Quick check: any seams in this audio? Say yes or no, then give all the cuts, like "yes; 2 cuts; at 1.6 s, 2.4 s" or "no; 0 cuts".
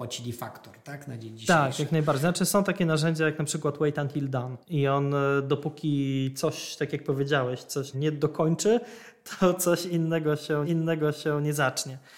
yes; 3 cuts; at 4.6 s, 7.9 s, 10.6 s